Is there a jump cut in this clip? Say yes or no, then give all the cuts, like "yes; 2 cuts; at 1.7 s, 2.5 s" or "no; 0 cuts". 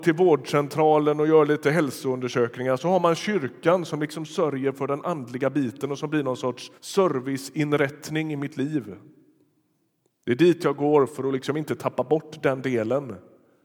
yes; 1 cut; at 6.8 s